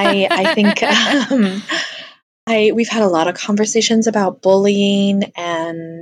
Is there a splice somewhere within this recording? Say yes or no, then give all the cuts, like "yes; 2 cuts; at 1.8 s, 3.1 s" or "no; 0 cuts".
no; 0 cuts